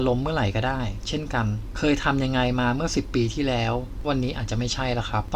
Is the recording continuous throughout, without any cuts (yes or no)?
no